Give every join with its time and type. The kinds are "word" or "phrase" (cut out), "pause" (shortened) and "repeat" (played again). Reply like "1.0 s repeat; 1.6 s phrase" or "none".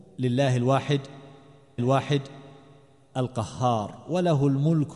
1.8 s repeat